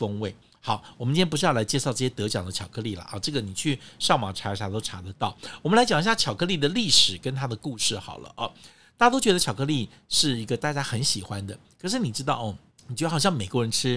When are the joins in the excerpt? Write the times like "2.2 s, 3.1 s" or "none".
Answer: none